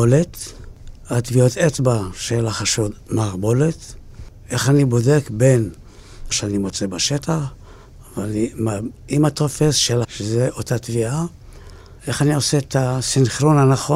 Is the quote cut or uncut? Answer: cut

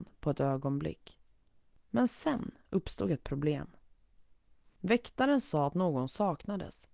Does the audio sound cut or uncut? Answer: uncut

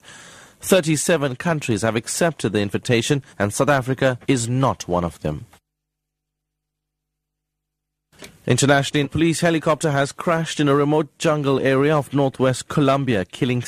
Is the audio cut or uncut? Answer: cut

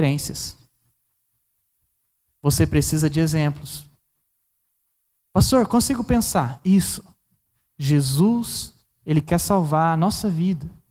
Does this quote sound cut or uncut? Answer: uncut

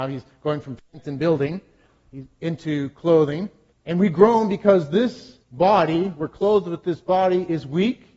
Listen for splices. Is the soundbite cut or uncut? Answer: cut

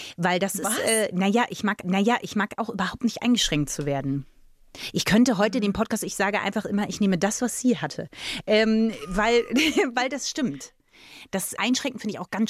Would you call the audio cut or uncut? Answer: cut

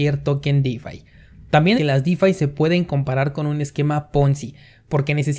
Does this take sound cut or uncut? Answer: cut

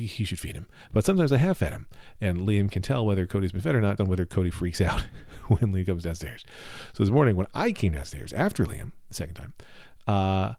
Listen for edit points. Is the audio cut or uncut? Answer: cut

